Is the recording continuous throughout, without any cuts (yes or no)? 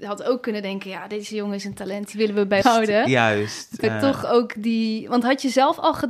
no